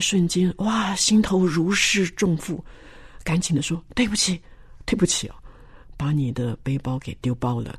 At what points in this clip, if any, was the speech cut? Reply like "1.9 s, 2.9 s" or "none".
none